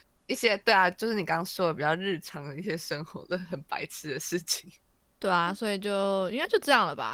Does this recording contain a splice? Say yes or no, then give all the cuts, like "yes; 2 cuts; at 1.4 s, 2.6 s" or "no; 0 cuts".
no; 0 cuts